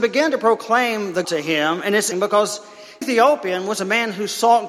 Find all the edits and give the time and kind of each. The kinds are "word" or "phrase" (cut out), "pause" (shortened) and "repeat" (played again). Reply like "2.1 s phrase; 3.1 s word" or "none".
1.2 s word; 2.1 s word; 3.0 s word